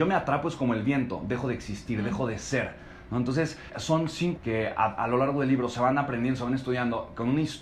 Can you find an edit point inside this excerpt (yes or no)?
yes